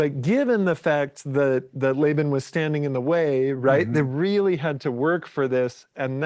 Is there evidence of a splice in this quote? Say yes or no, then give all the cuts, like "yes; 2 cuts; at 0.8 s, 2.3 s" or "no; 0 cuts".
no; 0 cuts